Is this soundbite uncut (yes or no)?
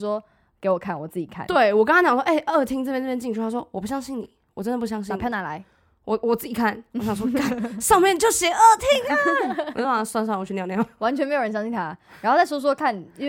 yes